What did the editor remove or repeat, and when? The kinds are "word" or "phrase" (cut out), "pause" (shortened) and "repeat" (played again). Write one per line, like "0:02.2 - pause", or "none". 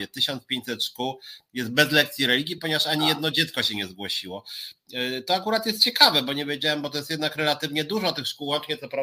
none